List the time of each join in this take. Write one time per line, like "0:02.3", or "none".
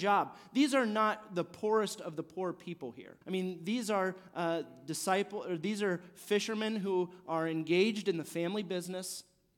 0:03.2